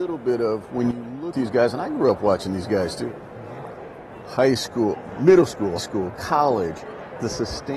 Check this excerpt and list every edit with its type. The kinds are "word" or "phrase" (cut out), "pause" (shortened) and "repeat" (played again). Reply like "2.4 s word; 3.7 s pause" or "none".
1.3 s word; 5.8 s word